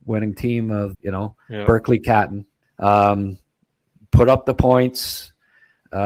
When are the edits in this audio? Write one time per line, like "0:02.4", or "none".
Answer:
0:00.9
0:02.6